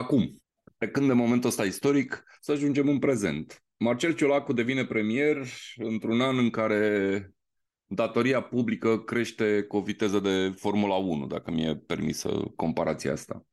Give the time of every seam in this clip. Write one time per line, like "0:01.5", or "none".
none